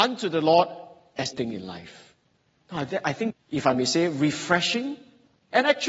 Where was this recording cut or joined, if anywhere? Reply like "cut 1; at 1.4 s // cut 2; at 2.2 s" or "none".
cut 1; at 1.3 s // cut 2; at 3.3 s